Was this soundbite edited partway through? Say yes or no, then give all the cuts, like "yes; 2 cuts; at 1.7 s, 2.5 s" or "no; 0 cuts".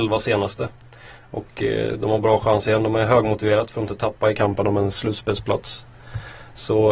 no; 0 cuts